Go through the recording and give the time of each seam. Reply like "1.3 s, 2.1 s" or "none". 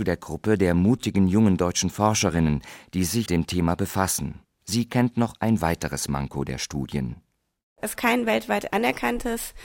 3.3 s, 4.4 s, 8.0 s